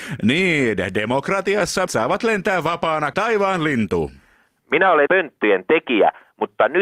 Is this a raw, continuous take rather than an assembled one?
no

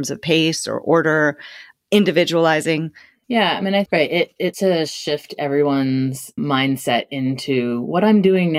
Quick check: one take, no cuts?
no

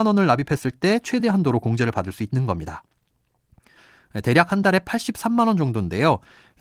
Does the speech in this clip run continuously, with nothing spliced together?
yes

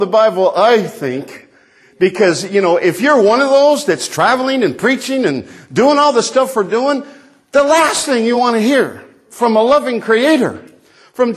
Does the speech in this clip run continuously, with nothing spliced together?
yes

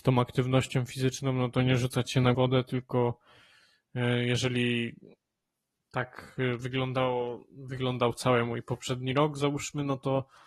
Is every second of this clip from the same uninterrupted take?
no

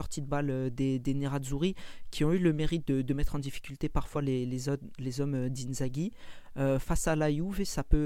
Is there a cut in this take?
no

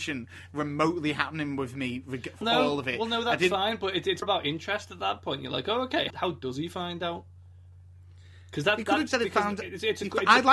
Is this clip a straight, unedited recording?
no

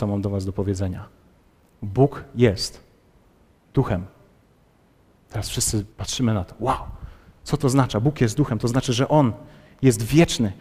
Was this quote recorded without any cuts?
no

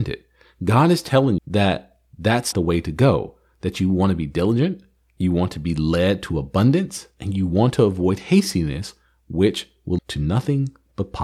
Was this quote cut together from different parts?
yes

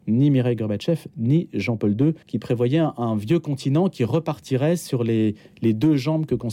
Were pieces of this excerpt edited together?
yes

